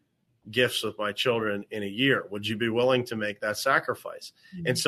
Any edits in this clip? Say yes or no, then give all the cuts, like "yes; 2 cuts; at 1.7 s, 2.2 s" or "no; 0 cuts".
no; 0 cuts